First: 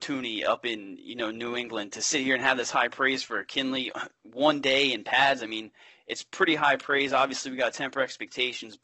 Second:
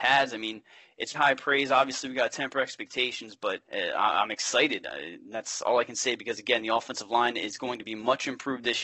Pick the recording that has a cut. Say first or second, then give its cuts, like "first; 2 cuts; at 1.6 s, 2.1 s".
second; 2 cuts; at 1.1 s, 3.6 s